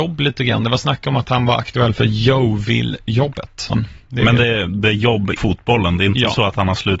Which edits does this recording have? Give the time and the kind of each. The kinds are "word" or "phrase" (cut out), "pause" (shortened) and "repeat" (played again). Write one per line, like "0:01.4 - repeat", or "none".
0:03.7 - phrase
0:05.4 - word